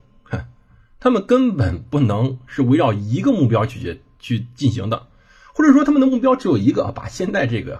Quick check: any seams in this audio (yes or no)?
no